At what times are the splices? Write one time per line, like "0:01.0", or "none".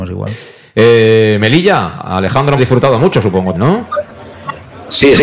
0:02.6
0:03.5

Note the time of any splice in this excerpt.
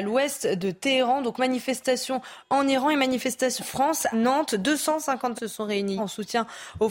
0:03.6
0:04.1
0:05.3
0:06.0

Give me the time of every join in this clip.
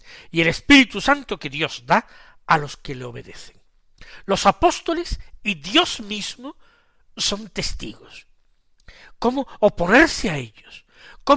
none

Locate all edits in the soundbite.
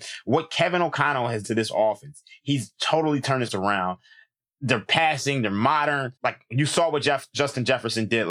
0:01.4
0:03.5
0:06.2

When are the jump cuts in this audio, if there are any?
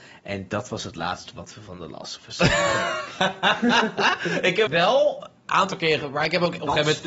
0:04.7

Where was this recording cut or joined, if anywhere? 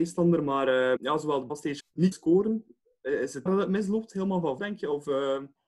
0:01.0
0:01.5
0:01.8
0:02.1
0:03.5
0:04.6

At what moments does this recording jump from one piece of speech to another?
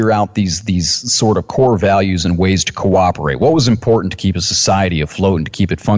none

